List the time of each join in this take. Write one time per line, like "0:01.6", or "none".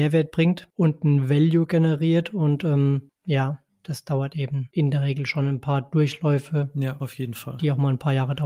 none